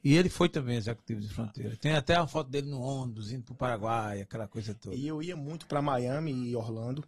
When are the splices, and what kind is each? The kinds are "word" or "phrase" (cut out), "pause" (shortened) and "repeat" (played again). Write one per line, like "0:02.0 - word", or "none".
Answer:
none

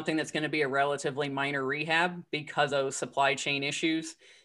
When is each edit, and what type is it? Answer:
0:02.7 - word

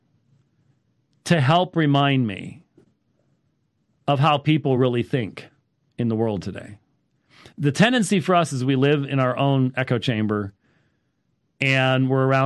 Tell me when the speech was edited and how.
none

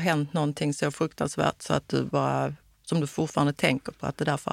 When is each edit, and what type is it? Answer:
none

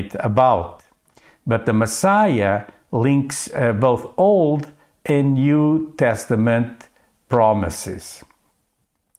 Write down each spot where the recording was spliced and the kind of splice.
none

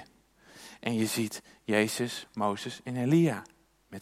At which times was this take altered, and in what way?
none

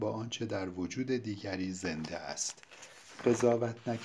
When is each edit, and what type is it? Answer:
none

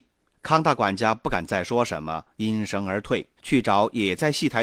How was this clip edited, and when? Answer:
0:03.4 - pause

